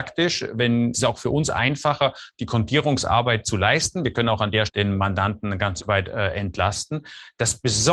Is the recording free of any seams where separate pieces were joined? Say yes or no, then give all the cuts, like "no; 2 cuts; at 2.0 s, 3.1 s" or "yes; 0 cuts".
no; 4 cuts; at 0.9 s, 3.4 s, 4.7 s, 5.8 s